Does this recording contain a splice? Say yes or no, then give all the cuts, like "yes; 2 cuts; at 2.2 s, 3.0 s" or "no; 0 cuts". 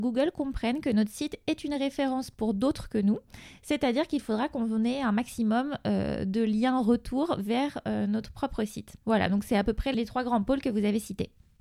yes; 1 cut; at 9.0 s